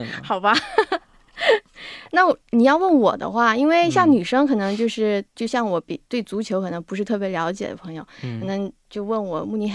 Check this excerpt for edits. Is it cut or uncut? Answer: uncut